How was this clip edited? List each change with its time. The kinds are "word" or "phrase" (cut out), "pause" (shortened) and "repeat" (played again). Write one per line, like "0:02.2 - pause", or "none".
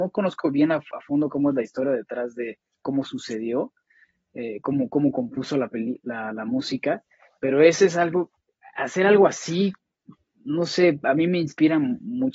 none